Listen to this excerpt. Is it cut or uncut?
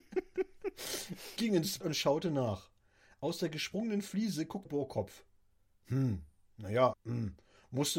cut